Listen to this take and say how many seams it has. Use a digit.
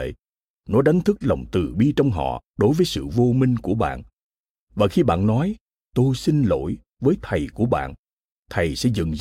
0